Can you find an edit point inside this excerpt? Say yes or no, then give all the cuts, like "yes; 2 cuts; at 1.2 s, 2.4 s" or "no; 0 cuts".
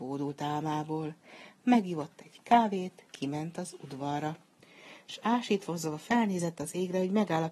yes; 1 cut; at 3.1 s